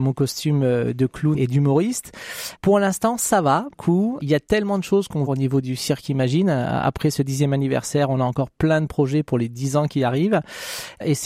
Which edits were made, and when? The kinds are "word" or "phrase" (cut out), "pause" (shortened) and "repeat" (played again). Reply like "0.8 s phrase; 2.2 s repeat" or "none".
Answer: 1.4 s word; 3.7 s phrase; 5.3 s phrase